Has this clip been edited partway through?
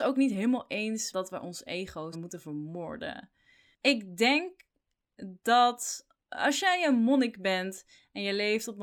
yes; 2 cuts; at 1.1 s, 2.1 s

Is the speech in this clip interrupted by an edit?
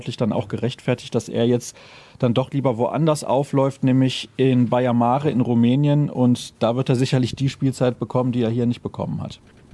no; 0 cuts

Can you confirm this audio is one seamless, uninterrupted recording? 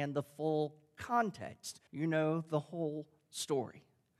no; 1 cut; at 1.9 s

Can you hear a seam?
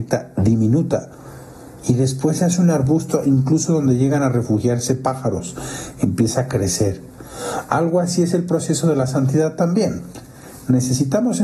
no; 0 cuts

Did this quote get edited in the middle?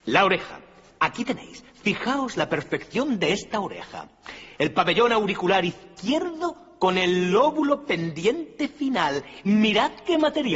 no; 0 cuts

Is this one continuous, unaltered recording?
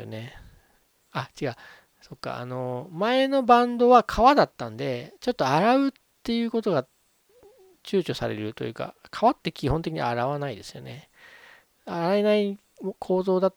yes; 0 cuts

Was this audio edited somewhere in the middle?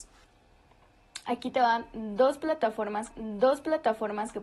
yes; 1 cut; at 3.1 s

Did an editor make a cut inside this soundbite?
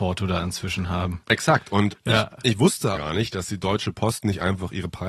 yes; 1 cut; at 2.9 s

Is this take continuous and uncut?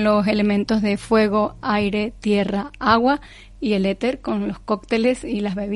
yes; 0 cuts

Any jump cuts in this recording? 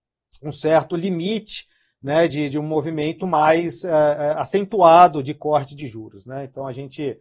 no; 0 cuts

